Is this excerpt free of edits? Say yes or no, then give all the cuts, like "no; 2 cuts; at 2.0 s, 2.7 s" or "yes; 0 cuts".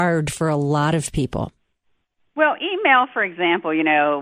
yes; 0 cuts